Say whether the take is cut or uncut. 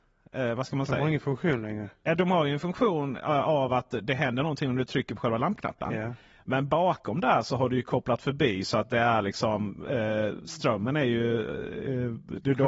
uncut